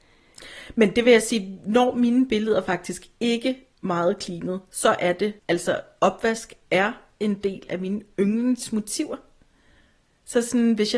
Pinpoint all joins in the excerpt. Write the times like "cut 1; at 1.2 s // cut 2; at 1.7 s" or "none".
cut 1; at 3.7 s // cut 2; at 5.4 s // cut 3; at 7.7 s